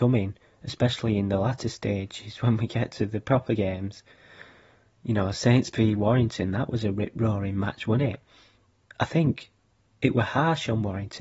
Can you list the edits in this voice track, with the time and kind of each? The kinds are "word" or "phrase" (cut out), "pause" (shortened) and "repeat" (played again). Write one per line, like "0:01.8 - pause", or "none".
none